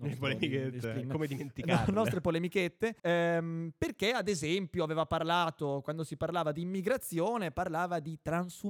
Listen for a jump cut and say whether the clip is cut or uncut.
cut